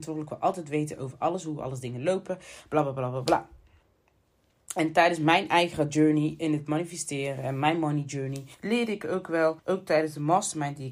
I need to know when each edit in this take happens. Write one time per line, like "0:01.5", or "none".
0:08.5
0:09.6